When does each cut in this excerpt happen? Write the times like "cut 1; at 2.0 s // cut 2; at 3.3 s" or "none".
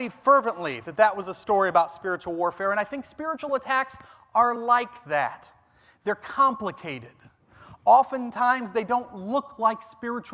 none